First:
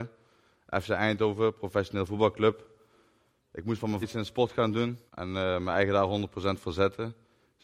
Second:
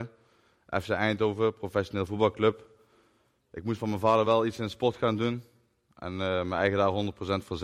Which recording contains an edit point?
first; 2 cuts; at 4.0 s, 5.1 s

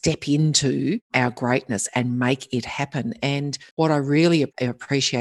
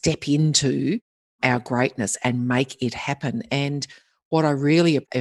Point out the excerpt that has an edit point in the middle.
first; 2 cuts; at 1.0 s, 3.7 s

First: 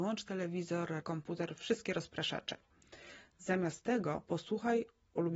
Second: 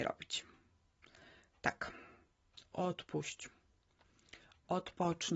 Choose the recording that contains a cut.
first; 1 cut; at 1.0 s

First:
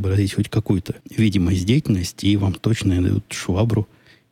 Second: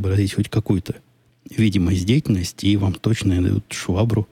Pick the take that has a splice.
first; 1 cut; at 1.0 s

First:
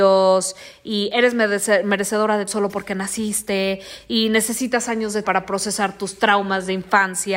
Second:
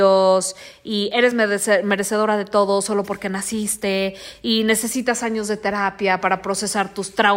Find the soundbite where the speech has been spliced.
first; 2 cuts; at 2.5 s, 5.2 s

